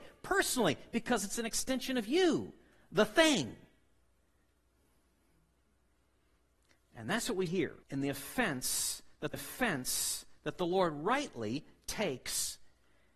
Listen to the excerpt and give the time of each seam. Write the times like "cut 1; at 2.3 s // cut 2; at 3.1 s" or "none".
cut 1; at 7.5 s // cut 2; at 7.8 s // cut 3; at 9.3 s